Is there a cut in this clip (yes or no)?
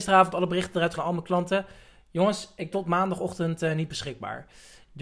yes